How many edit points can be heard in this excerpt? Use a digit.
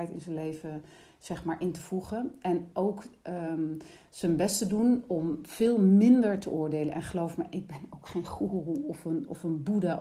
0